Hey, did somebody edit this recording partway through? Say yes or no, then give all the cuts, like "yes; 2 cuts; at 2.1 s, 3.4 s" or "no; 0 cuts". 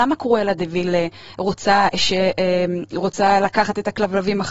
no; 0 cuts